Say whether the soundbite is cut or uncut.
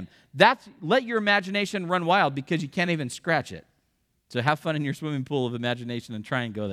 uncut